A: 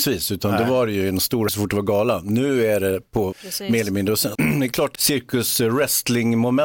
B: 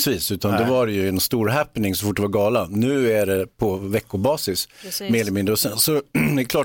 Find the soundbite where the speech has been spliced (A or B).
A